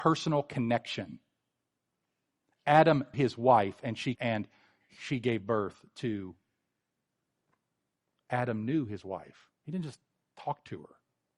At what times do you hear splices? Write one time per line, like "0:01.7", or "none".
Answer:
0:03.1
0:04.1